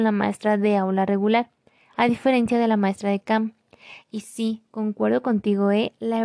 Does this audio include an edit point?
no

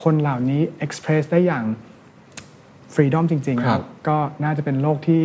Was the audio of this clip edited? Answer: no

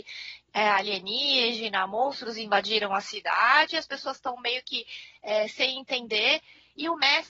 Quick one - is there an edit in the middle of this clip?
no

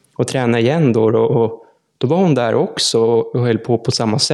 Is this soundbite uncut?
yes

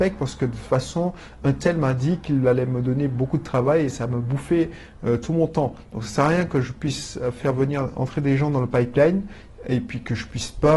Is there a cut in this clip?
no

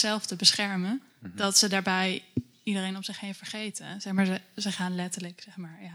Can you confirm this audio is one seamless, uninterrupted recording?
no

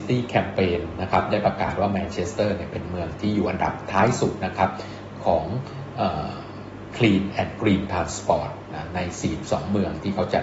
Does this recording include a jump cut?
no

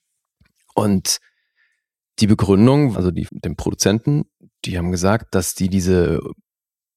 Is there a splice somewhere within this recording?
yes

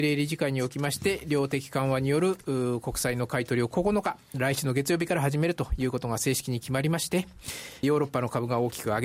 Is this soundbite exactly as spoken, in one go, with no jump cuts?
no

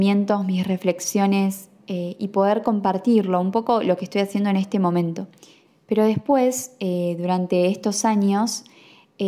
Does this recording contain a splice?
no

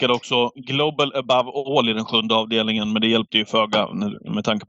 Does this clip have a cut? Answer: no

